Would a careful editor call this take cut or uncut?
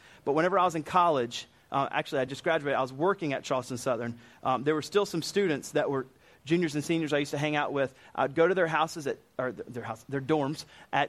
uncut